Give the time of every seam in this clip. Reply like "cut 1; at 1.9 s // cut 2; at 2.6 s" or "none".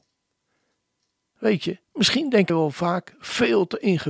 cut 1; at 1.8 s // cut 2; at 2.5 s